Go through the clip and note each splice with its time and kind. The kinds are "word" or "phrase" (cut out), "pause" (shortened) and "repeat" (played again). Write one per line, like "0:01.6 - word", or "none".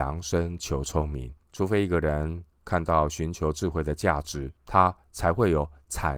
0:01.4 - pause
0:02.5 - pause
0:04.6 - pause